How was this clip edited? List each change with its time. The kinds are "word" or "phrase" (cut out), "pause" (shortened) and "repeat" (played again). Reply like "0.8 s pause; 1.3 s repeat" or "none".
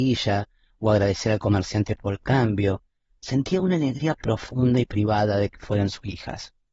none

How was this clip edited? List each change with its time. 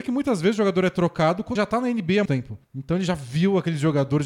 1.6 s word; 2.3 s word; 2.6 s pause

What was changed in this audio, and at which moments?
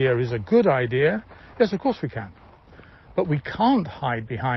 none

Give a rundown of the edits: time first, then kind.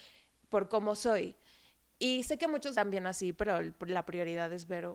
2.7 s phrase

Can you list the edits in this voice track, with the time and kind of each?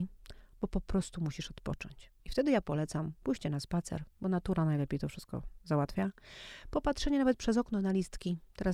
2.2 s pause

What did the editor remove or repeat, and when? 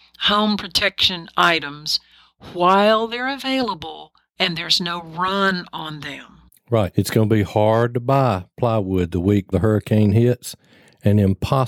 9.5 s word

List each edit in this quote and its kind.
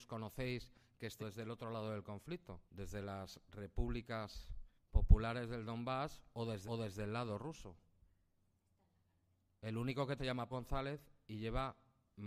1.2 s word; 2.7 s pause; 4.8 s pause; 6.6 s repeat; 10.2 s word; 10.5 s word

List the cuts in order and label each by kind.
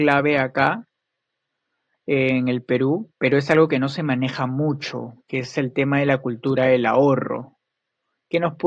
3.1 s pause

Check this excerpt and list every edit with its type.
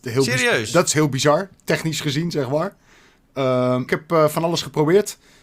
3.9 s phrase

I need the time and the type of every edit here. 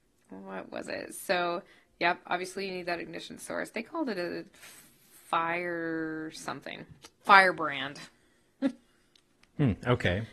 none

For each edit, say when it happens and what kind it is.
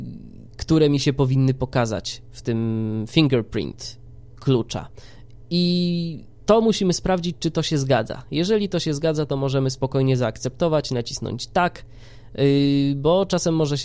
6.3 s pause

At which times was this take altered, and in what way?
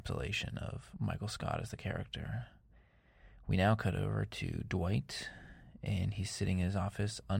0.9 s word

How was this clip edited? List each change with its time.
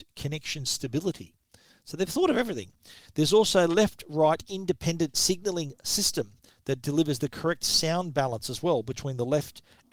none

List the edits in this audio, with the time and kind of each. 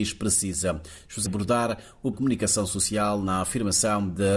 1.3 s phrase; 2.1 s phrase

